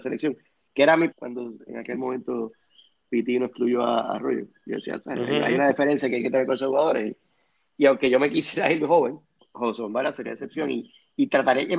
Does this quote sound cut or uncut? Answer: cut